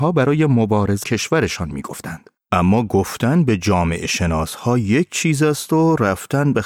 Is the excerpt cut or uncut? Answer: cut